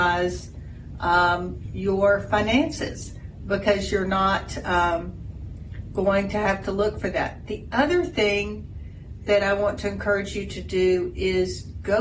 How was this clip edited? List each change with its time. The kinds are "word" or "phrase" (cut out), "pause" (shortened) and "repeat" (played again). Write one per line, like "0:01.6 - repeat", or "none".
none